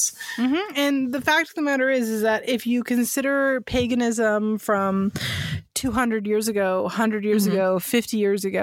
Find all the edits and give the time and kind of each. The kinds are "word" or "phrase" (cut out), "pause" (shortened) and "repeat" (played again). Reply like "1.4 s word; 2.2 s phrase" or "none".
none